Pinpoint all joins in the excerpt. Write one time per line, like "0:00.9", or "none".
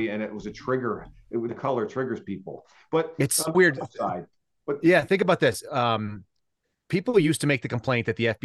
0:01.5
0:03.5